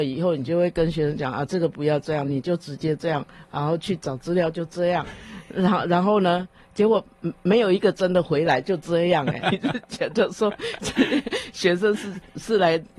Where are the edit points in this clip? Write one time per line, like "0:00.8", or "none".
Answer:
0:09.4